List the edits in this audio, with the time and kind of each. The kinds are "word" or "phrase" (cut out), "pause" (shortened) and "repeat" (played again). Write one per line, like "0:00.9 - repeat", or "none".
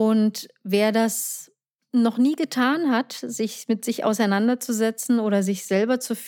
none